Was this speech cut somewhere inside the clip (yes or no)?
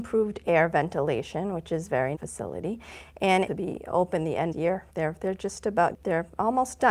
yes